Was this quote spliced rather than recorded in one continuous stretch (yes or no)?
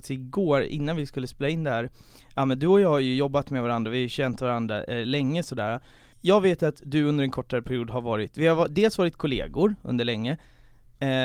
no